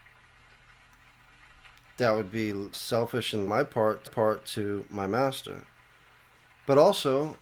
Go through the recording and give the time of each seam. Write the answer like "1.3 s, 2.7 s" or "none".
2.7 s, 3.5 s, 4.1 s